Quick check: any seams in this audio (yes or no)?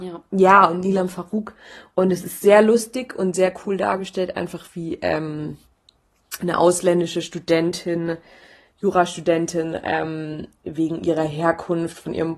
no